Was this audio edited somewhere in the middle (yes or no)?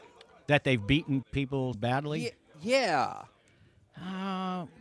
yes